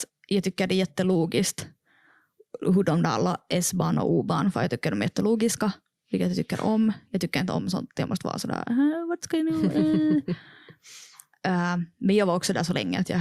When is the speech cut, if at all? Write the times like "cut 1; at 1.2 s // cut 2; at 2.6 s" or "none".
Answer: none